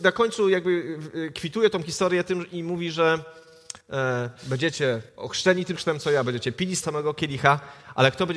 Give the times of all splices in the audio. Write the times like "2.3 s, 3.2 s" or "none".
3.8 s, 5.1 s, 5.8 s, 6.8 s